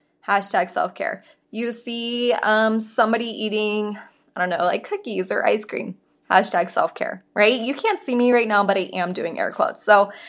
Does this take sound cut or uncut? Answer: uncut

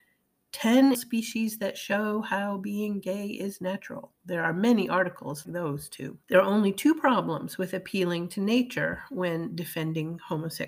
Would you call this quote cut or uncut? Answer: cut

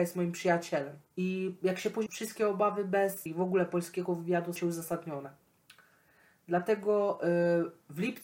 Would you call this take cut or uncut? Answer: cut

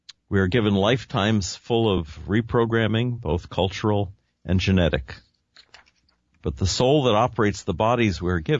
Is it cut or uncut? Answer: uncut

